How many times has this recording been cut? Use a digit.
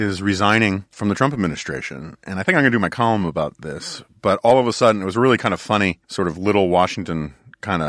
1